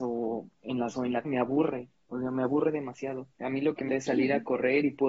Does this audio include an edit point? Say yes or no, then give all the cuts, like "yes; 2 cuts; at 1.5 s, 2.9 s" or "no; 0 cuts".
yes; 4 cuts; at 0.9 s, 1.2 s, 3.3 s, 3.9 s